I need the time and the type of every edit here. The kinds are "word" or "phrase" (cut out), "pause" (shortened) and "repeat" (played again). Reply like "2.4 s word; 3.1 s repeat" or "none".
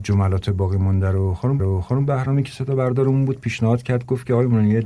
1.6 s repeat